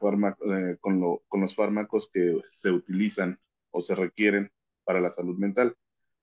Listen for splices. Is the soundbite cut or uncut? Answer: uncut